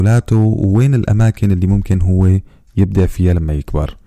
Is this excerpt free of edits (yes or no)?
yes